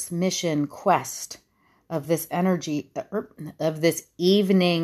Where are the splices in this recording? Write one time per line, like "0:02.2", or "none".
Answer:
none